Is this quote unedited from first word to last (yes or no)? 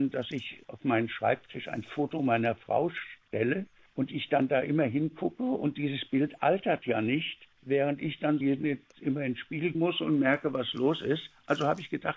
no